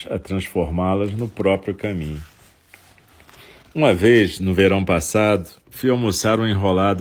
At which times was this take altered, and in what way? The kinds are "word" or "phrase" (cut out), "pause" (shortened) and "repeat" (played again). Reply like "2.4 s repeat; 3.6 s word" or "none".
none